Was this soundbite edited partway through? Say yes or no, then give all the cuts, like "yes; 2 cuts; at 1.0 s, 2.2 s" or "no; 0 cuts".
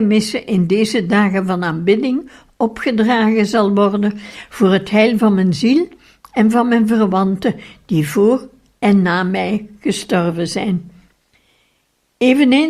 no; 0 cuts